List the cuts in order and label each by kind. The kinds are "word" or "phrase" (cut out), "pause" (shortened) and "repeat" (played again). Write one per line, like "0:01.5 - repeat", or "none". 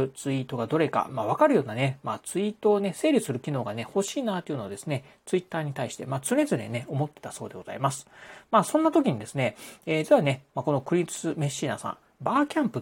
none